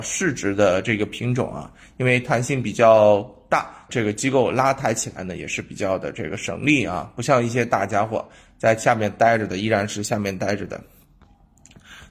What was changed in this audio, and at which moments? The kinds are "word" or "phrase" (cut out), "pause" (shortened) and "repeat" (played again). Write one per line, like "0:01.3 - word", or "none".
0:03.9 - phrase